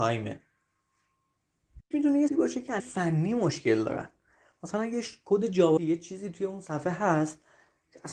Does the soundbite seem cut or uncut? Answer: cut